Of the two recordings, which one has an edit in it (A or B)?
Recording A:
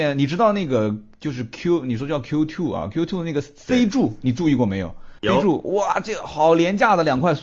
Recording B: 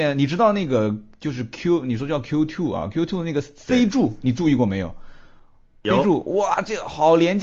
A